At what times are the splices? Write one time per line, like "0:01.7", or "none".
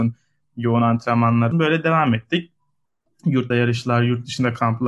0:01.5
0:03.5